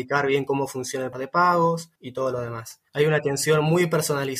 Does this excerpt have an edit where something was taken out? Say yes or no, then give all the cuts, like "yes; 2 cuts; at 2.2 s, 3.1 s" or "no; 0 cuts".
yes; 3 cuts; at 1.1 s, 2.0 s, 2.9 s